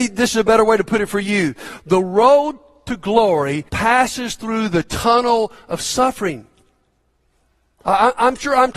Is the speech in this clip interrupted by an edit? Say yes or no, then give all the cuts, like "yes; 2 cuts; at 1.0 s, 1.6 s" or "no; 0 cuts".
yes; 1 cut; at 3.7 s